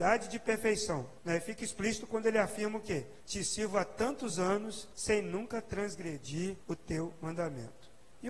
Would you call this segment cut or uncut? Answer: cut